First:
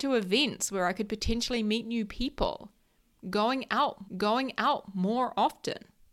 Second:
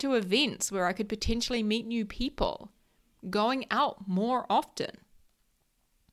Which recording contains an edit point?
first; 1 cut; at 4.0 s

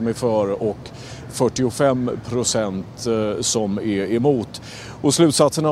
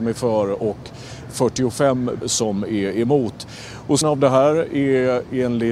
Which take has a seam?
second; 2 cuts; at 2.2 s, 4.0 s

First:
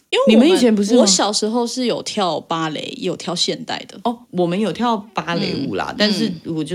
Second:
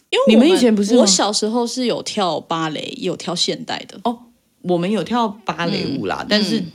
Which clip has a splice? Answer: first; 1 cut; at 4.2 s

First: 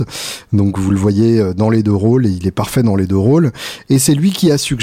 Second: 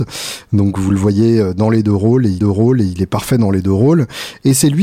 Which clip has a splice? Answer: second; 1 cut; at 2.4 s

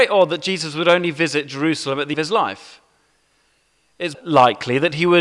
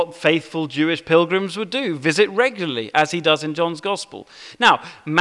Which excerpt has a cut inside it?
first; 2 cuts; at 2.1 s, 4.1 s

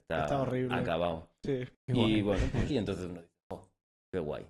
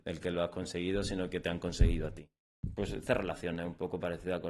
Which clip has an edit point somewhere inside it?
first; 2 cuts; at 1.7 s, 2.7 s

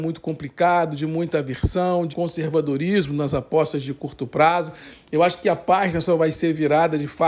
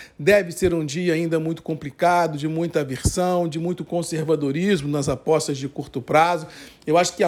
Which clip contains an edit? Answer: first; 1 cut; at 2.1 s

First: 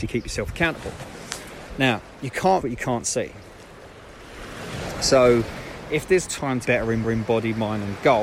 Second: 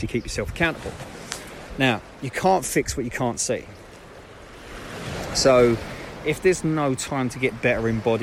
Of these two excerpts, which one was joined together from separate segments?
first; 4 cuts; at 2.6 s, 6.3 s, 6.7 s, 7.0 s

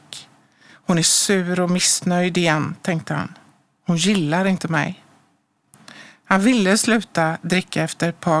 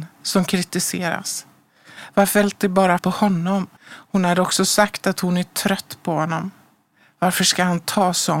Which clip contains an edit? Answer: second; 3 cuts; at 2.4 s, 3.0 s, 3.8 s

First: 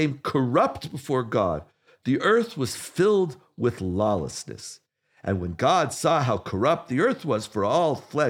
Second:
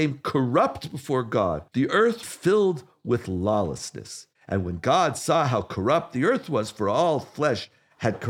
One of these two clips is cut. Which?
second; 3 cuts; at 1.7 s, 2.2 s, 4.4 s

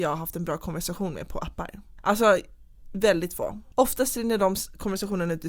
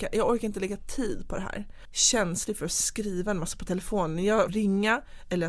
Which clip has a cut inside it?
second; 1 cut; at 4.5 s

